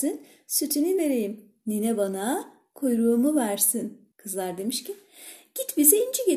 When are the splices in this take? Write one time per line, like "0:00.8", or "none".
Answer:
0:01.0
0:04.1

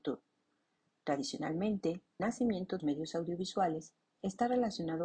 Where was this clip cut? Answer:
0:02.2
0:02.8

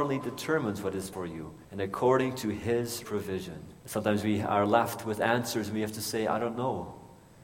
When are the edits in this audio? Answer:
0:01.1
0:01.6
0:03.0
0:03.8

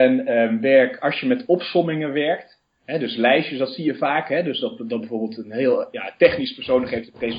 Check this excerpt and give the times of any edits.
0:02.7

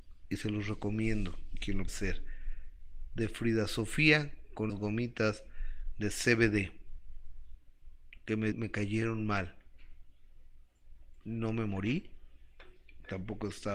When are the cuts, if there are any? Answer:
0:01.9
0:04.7
0:08.5

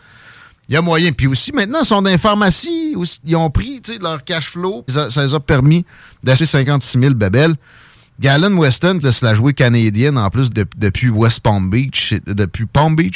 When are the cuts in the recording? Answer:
0:04.9
0:06.4
0:09.0
0:10.5

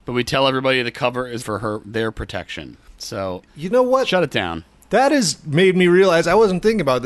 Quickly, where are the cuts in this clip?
0:01.4
0:03.5

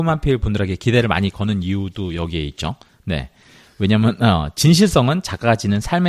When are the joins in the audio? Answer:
none

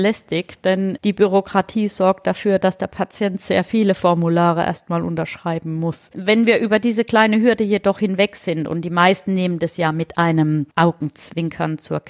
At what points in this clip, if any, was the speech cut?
0:10.7

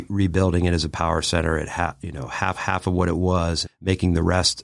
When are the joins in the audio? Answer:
0:02.5
0:03.6

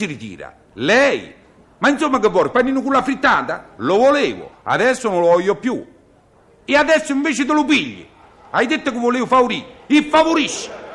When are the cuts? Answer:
none

